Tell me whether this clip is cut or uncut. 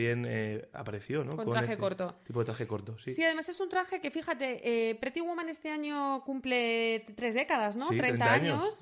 uncut